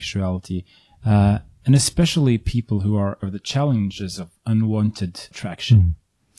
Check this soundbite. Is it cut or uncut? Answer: cut